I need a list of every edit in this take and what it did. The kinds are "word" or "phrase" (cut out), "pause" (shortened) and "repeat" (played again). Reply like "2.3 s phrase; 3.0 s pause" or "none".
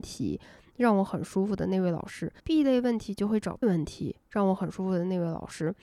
2.4 s pause; 3.6 s word

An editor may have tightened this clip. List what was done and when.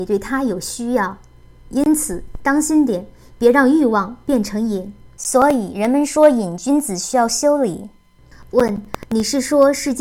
none

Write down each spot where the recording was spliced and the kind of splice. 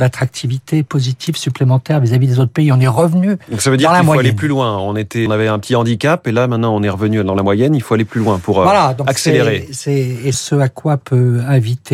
5.3 s word; 10.3 s phrase

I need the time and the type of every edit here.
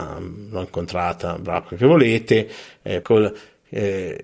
1.6 s word; 3.0 s word

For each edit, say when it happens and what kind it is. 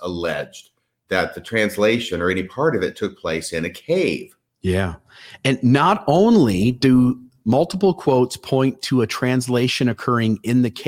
none

